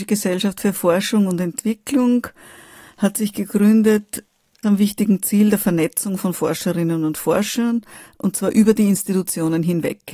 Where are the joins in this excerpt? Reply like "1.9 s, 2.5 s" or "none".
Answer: 4.6 s